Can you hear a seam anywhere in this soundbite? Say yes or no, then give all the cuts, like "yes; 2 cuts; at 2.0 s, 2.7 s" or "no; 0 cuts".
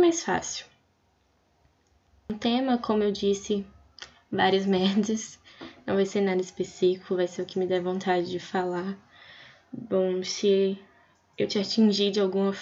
no; 0 cuts